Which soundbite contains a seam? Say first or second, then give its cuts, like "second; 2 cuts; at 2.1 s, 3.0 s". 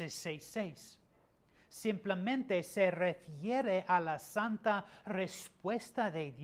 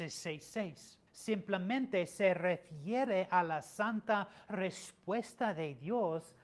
second; 1 cut; at 1.1 s